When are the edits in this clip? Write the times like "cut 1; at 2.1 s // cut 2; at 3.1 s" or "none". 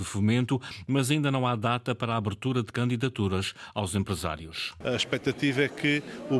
none

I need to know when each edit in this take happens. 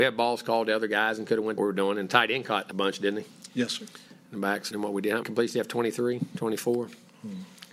cut 1; at 1.6 s // cut 2; at 2.7 s // cut 3; at 4.7 s // cut 4; at 5.2 s

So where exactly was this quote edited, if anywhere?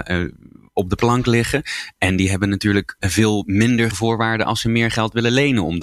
cut 1; at 3.0 s // cut 2; at 3.9 s

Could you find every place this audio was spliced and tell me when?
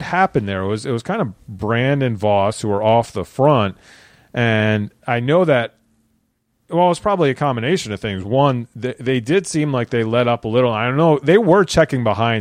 none

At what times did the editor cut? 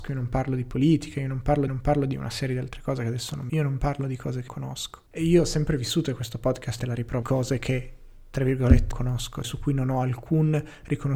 cut 1; at 1.7 s // cut 2; at 3.5 s // cut 3; at 4.5 s // cut 4; at 5.1 s // cut 5; at 6.8 s // cut 6; at 7.2 s // cut 7; at 8.9 s // cut 8; at 9.4 s

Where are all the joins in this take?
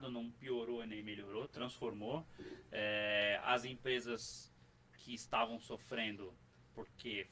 none

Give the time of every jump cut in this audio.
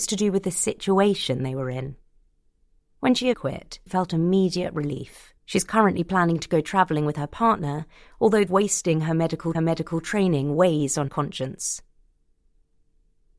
cut 1; at 3.3 s // cut 2; at 3.9 s // cut 3; at 5.4 s // cut 4; at 8.5 s // cut 5; at 9.5 s // cut 6; at 11.1 s

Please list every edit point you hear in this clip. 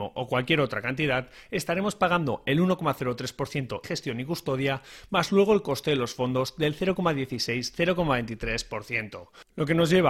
cut 1; at 3.8 s

